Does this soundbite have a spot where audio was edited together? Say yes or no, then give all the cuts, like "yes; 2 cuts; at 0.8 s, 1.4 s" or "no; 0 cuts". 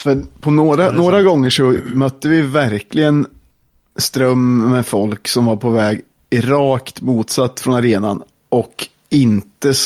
no; 0 cuts